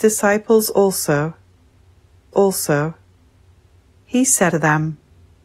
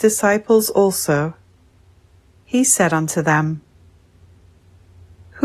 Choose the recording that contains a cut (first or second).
first